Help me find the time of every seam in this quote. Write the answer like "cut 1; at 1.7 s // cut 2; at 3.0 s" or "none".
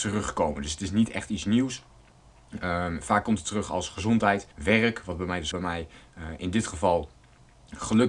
cut 1; at 4.5 s // cut 2; at 5.5 s